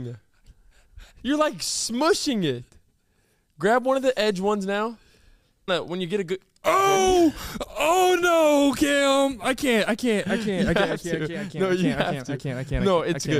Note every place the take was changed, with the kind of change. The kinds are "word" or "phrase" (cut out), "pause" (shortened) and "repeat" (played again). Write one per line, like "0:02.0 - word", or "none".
0:05.7 - phrase